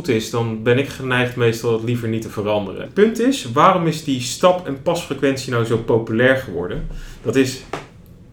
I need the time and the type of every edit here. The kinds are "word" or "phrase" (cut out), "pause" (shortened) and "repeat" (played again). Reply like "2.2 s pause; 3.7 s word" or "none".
none